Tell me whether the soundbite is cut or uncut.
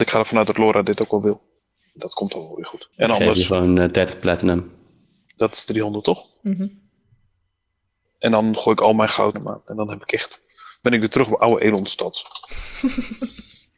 cut